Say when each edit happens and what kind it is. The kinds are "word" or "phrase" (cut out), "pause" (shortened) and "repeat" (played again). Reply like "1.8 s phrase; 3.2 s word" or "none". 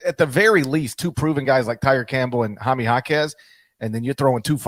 none